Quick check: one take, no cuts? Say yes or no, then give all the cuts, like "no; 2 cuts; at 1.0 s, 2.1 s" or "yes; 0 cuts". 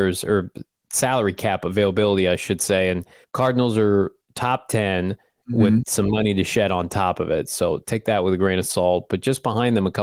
no; 1 cut; at 3.2 s